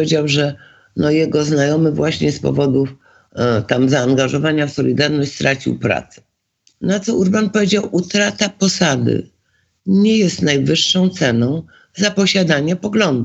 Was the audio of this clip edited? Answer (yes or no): no